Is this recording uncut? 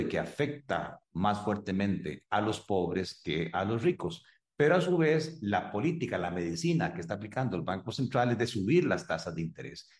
yes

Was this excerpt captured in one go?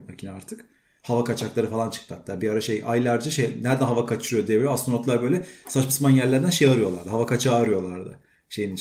yes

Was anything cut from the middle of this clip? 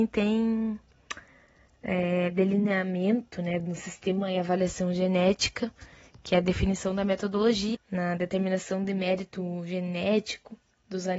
yes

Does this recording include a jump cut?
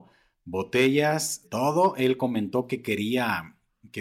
yes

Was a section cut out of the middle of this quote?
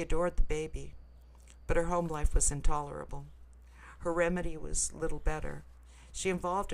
no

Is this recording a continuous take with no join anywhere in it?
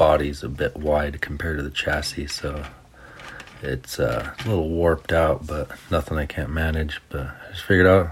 yes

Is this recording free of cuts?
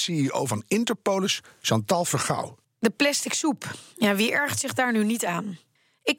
yes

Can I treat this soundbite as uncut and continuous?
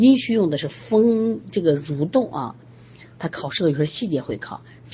yes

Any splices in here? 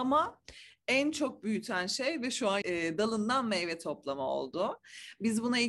yes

